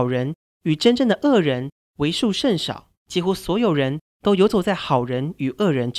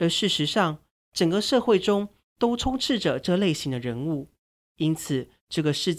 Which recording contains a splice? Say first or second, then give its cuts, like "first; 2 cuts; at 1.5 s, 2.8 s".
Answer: first; 1 cut; at 3.0 s